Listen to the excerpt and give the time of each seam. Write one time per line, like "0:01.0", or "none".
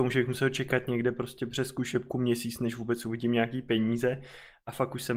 none